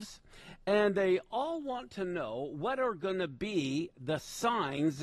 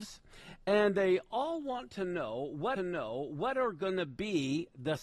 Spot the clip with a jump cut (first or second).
second